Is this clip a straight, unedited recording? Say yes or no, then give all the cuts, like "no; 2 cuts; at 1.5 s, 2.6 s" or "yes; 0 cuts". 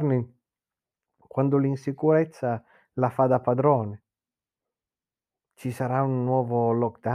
yes; 0 cuts